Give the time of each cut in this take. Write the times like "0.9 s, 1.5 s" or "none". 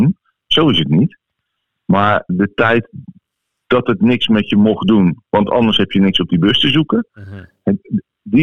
2.3 s